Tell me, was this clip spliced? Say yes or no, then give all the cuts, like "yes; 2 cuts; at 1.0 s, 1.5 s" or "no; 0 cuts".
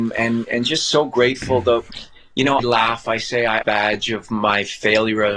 yes; 2 cuts; at 2.6 s, 3.6 s